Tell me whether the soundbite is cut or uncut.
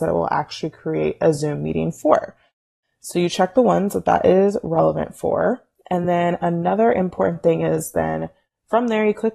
uncut